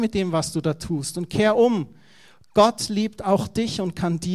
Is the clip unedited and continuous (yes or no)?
yes